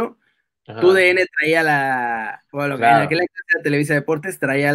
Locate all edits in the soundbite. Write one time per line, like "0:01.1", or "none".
0:02.5